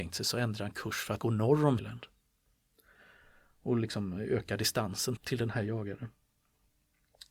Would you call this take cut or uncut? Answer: cut